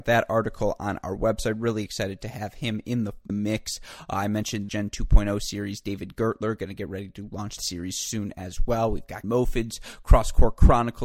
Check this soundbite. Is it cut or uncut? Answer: cut